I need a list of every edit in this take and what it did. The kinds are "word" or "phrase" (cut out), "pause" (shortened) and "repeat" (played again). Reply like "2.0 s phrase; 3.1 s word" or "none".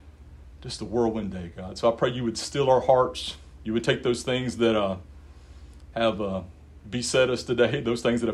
none

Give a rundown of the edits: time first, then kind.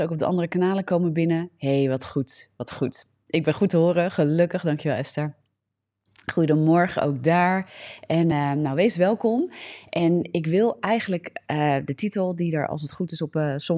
none

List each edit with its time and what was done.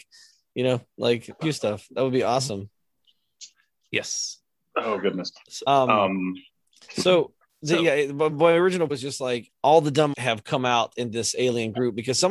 1.4 s word; 8.3 s word; 8.9 s word; 9.5 s word; 10.1 s word

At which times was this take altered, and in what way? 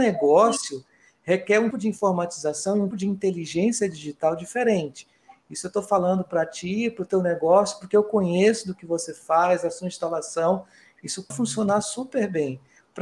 1.7 s word; 2.9 s word; 11.3 s word

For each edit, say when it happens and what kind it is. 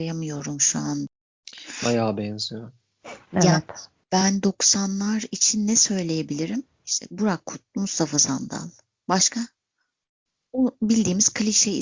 3.9 s pause

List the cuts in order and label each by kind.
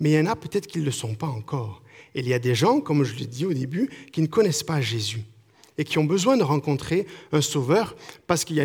none

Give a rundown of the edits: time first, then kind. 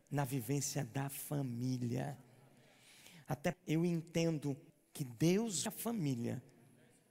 3.5 s word; 4.7 s pause; 5.7 s word

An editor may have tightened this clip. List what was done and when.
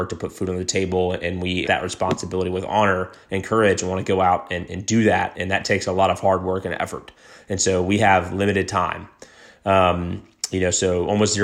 1.6 s word; 5.3 s word

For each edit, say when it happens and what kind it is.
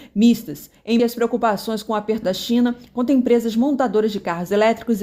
1.0 s word; 2.2 s word

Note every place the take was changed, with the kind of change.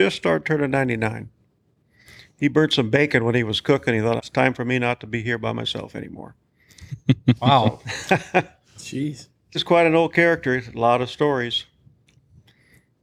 4.2 s word; 9.5 s word

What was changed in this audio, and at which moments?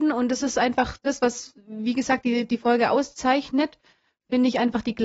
none

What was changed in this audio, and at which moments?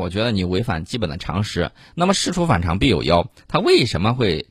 none

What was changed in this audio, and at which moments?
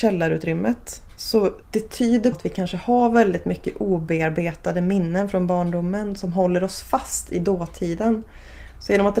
1.6 s pause; 2.3 s word

